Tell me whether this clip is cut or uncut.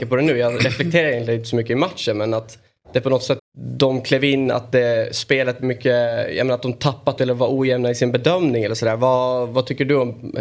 cut